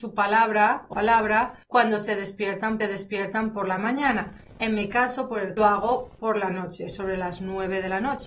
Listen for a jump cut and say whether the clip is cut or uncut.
cut